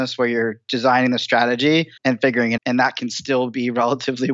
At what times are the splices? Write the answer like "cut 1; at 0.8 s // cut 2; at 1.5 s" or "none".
cut 1; at 2.0 s // cut 2; at 2.6 s